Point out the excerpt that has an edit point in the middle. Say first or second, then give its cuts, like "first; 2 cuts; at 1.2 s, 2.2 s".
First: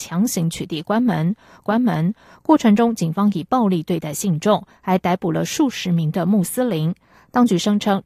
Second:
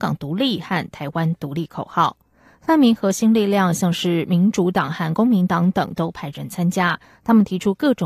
first; 1 cut; at 1.6 s